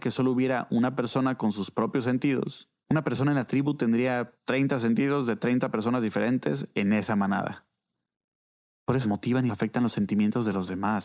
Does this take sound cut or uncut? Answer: cut